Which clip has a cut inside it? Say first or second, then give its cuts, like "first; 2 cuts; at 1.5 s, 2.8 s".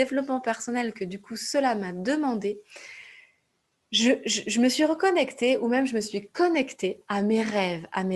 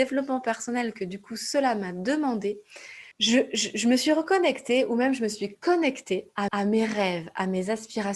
second; 2 cuts; at 3.1 s, 6.5 s